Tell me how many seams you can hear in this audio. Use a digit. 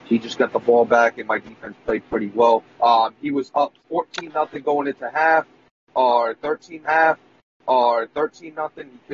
3